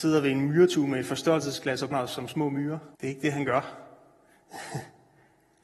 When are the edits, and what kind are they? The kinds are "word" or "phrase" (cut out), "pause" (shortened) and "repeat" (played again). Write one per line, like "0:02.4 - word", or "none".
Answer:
0:01.9 - word
0:02.9 - pause